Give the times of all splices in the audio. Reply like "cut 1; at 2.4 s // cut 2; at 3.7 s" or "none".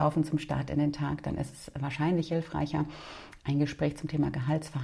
none